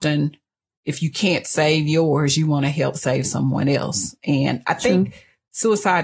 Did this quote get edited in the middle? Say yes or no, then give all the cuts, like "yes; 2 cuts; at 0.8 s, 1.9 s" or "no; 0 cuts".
no; 0 cuts